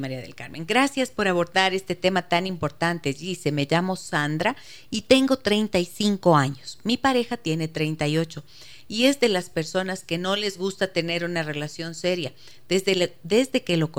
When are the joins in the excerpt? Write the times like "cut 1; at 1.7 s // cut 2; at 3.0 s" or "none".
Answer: none